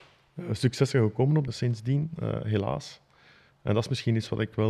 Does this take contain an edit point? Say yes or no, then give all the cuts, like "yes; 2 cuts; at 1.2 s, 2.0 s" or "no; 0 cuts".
yes; 1 cut; at 1.5 s